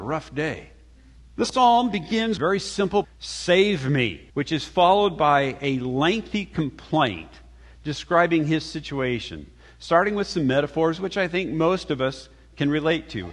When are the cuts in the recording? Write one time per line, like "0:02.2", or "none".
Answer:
0:01.2
0:02.4
0:03.0
0:04.3